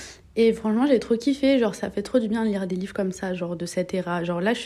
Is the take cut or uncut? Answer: uncut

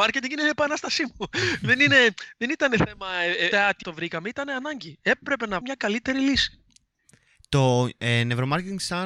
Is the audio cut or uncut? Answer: cut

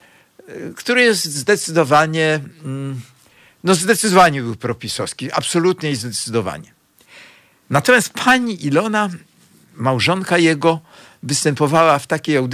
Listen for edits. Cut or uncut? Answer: uncut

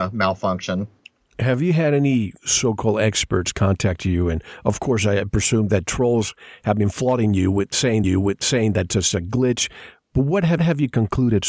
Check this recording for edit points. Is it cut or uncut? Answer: cut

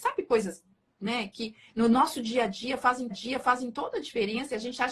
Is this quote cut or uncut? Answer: cut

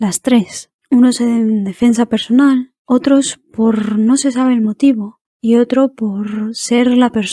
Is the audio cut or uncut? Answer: uncut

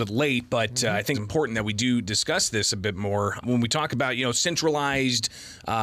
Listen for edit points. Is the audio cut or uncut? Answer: cut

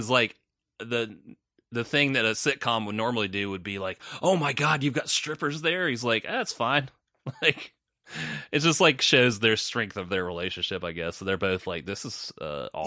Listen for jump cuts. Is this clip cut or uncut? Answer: uncut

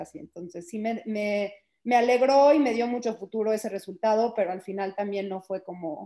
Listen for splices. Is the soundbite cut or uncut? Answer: uncut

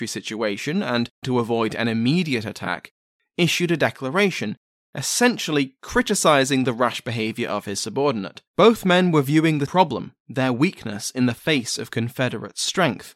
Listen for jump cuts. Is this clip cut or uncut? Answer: cut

